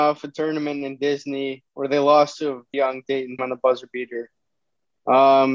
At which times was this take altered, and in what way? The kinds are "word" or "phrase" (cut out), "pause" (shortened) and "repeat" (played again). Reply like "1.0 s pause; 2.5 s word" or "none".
2.7 s word; 3.4 s word